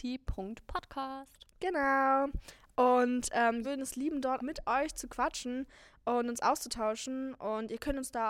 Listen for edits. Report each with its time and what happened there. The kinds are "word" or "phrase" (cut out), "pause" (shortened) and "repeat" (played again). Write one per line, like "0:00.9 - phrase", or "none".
0:01.5 - pause
0:03.6 - phrase
0:04.4 - word